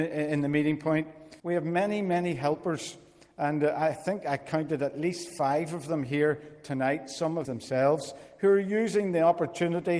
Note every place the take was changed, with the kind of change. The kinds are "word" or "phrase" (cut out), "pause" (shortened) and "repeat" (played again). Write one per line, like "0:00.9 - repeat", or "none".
0:01.4 - pause
0:07.4 - phrase

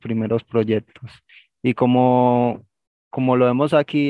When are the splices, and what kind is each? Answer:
none

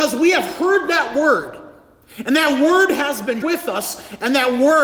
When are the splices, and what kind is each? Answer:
0:03.4 - word

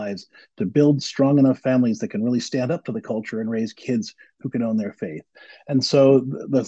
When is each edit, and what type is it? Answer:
none

